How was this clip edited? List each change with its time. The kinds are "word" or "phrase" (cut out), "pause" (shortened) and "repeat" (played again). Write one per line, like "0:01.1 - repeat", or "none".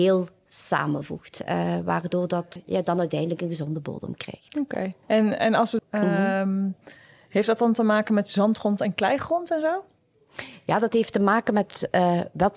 0:02.6 - word
0:05.0 - pause
0:05.8 - phrase